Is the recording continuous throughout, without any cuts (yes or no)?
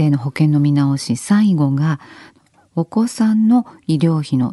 yes